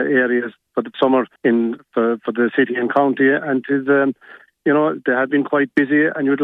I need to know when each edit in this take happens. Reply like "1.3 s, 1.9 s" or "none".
0.9 s, 1.4 s